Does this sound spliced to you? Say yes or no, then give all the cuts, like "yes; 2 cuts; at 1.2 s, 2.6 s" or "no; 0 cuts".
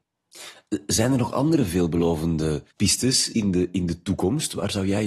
yes; 1 cut; at 2.7 s